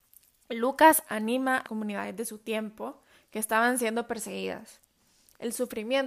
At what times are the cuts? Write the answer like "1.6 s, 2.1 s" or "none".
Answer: 1.6 s